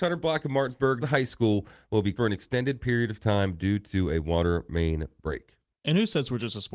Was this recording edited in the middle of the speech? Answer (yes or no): yes